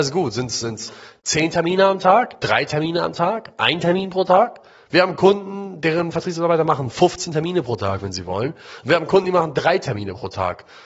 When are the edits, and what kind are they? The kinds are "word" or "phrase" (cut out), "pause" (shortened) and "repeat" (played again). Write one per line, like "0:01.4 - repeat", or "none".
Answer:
none